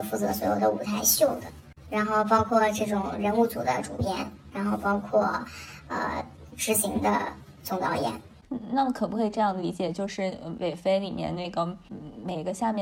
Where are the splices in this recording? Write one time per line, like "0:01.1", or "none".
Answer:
none

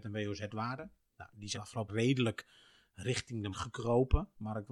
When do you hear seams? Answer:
0:01.5
0:01.9
0:03.5

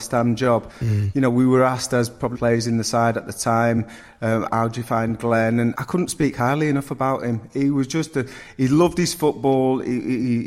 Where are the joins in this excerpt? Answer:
0:02.3
0:04.5
0:05.7

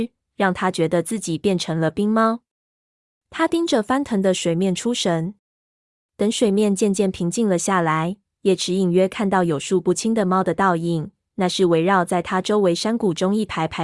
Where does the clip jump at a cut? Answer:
none

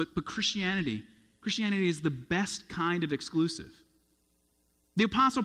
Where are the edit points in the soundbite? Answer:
none

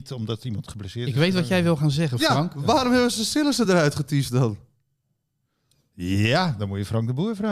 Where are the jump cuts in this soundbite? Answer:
none

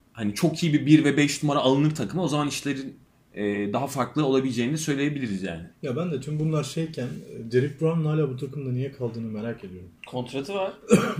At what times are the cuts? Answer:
0:03.1
0:05.7
0:10.0

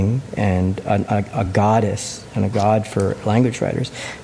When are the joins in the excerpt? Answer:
none

